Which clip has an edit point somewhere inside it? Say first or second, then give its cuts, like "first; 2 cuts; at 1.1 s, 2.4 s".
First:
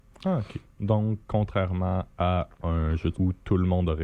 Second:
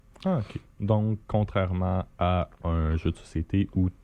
first; 1 cut; at 3.1 s